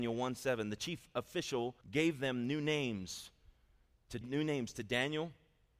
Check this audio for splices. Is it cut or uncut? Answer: cut